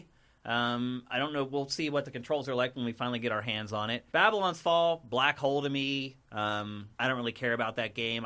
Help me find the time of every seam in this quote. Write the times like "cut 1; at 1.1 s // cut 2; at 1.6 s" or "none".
cut 1; at 4.1 s // cut 2; at 6.9 s